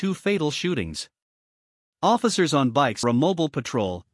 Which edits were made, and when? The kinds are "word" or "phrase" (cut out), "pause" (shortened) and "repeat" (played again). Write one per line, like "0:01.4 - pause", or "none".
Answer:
0:03.0 - word